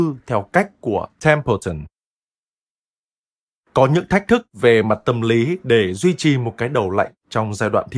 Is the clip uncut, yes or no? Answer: yes